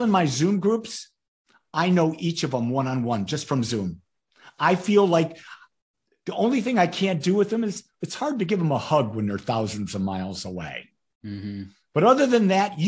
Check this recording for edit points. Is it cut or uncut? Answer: cut